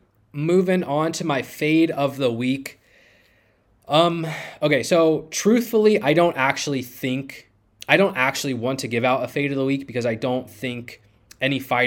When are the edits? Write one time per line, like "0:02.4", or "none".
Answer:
none